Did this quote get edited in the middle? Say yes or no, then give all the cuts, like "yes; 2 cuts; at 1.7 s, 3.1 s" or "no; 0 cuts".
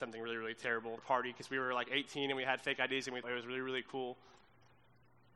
yes; 2 cuts; at 1.0 s, 3.2 s